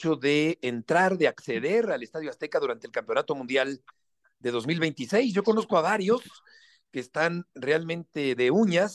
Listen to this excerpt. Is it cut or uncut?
uncut